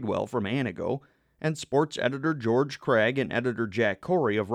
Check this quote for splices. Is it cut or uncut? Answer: uncut